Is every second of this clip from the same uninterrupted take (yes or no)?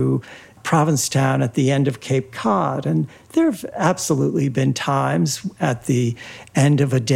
yes